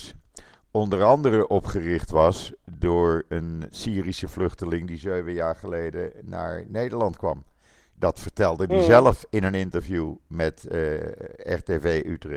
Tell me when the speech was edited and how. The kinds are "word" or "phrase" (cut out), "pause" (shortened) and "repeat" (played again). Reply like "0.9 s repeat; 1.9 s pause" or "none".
none